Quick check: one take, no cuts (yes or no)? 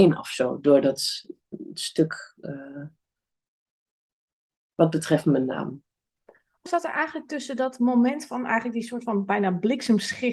no